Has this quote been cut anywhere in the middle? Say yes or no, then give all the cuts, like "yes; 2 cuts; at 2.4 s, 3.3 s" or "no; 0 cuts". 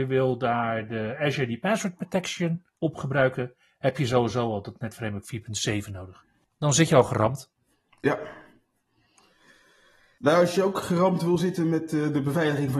yes; 1 cut; at 2.7 s